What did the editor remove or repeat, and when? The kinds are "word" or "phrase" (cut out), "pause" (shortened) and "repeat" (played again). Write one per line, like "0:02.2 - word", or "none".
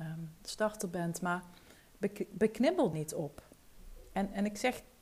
0:01.8 - pause
0:02.9 - word

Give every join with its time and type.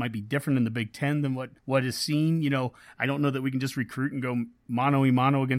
0:01.6 - pause

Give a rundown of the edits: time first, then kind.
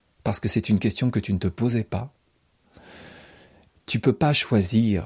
none

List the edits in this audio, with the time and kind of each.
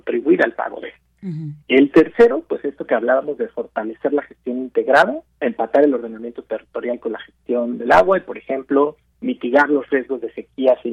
0:01.6 - pause
0:05.3 - pause

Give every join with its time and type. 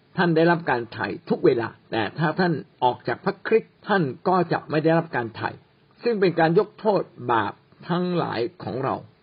0:01.8 - pause
0:02.7 - pause
0:03.8 - pause
0:05.8 - pause

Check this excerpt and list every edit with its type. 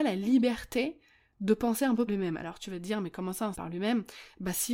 0:02.1 - word
0:03.5 - phrase

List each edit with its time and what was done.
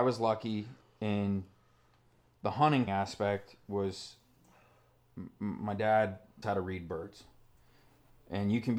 0:02.9 - word
0:06.4 - word

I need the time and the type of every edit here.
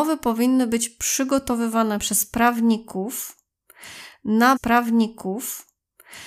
0:04.6 - repeat

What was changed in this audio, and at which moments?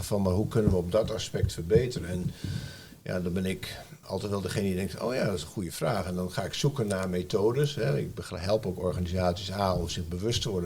0:04.0 - word

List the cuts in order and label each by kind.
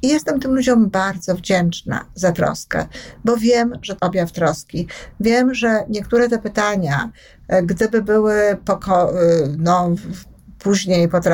0:04.0 - word
0:10.0 - word

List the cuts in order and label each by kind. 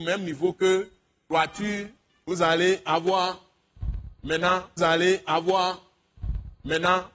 0:04.8 - repeat

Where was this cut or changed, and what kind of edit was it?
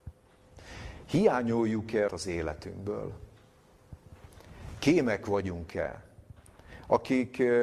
0:02.1 - phrase

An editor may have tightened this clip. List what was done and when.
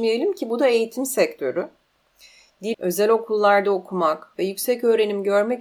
0:02.7 - word

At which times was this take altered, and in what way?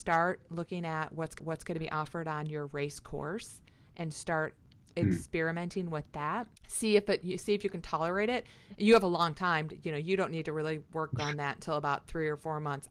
0:01.4 - repeat
0:06.6 - pause

